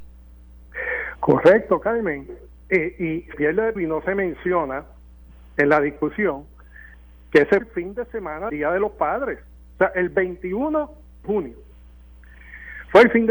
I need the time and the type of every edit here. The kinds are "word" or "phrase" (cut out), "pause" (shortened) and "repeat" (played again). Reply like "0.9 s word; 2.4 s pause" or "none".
3.3 s word; 3.8 s word; 7.6 s word; 8.5 s word; 11.2 s word